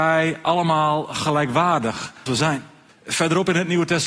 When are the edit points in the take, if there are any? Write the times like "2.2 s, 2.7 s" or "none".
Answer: 2.3 s, 2.9 s